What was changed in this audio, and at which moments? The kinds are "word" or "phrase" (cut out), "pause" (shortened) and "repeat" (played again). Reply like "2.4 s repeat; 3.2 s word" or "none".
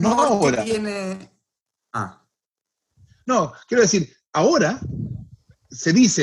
none